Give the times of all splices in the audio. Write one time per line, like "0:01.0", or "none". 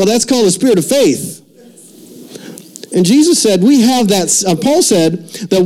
0:02.9